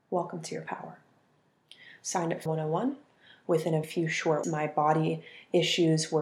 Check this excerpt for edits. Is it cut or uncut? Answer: cut